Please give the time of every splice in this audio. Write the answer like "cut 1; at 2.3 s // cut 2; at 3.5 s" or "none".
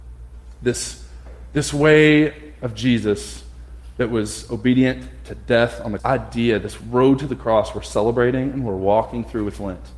cut 1; at 6.0 s